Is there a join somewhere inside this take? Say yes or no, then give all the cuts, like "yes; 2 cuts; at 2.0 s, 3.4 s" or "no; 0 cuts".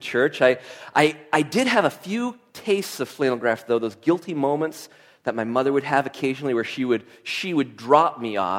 no; 0 cuts